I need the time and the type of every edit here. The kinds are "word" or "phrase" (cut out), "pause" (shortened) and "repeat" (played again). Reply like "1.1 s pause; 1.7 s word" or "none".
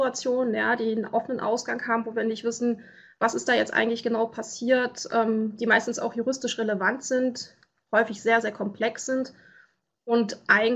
none

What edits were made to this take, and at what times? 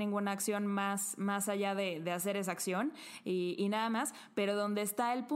2.0 s word

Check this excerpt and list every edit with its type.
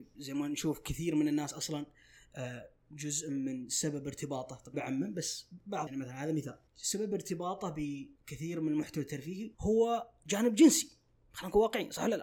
4.7 s word; 5.9 s word; 6.7 s pause; 8.2 s pause; 9.5 s pause

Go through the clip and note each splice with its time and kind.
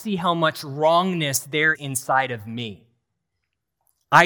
1.7 s word

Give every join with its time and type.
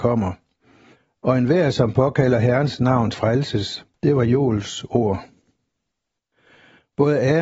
3.1 s word; 3.9 s pause

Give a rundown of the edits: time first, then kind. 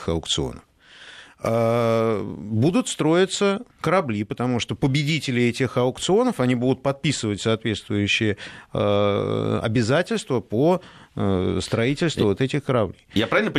3.7 s pause

